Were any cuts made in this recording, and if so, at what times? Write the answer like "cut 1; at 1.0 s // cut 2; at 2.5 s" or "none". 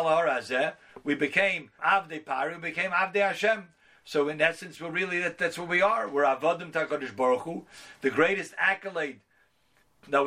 cut 1; at 1.8 s